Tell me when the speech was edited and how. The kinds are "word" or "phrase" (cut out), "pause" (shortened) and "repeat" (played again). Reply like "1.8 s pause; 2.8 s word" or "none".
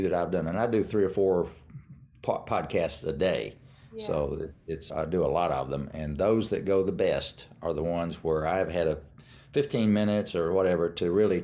4.9 s word